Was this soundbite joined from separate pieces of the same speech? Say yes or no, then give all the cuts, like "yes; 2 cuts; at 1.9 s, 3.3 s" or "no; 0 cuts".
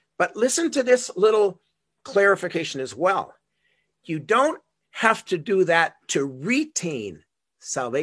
no; 0 cuts